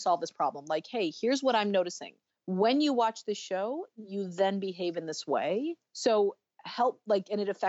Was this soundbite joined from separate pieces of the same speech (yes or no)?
yes